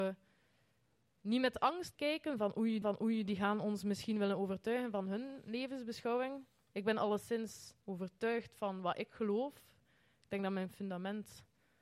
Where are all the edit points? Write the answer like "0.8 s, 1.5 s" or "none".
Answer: 1.9 s, 2.8 s, 7.8 s

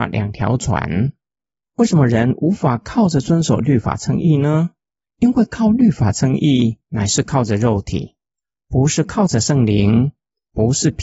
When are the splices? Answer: 6.8 s

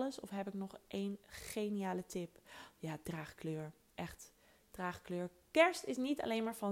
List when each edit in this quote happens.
none

